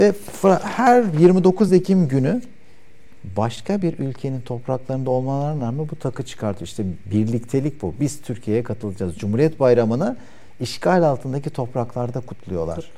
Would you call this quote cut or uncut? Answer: uncut